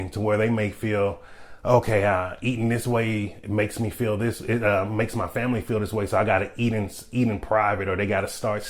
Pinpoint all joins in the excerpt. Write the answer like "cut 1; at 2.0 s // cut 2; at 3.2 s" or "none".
none